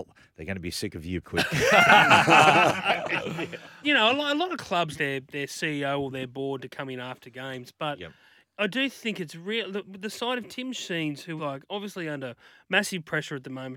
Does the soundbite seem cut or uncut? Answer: cut